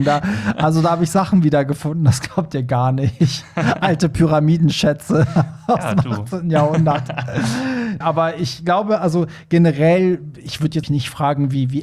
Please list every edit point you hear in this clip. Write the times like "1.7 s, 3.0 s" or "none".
8.0 s, 10.8 s